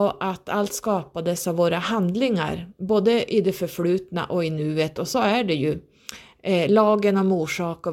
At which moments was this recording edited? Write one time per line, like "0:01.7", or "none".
none